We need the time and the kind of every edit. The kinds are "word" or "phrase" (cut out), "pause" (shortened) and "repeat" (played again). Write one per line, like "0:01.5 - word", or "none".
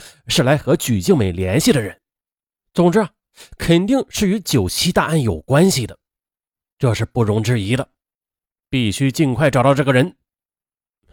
none

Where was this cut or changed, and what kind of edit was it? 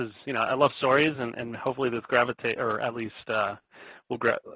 none

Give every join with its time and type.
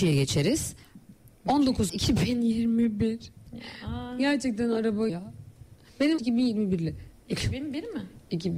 0:01.9 - word
0:05.1 - word
0:06.2 - word

